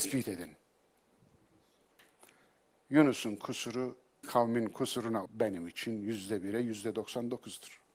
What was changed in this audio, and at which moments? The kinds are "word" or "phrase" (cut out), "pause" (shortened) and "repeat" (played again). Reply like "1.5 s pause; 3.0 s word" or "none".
4.2 s word; 5.3 s word